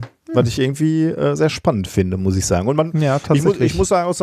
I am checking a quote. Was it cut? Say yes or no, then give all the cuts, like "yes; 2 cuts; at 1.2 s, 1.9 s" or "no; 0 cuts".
no; 0 cuts